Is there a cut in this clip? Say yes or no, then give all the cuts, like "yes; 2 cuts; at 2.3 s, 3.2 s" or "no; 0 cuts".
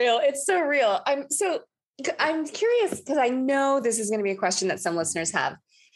no; 0 cuts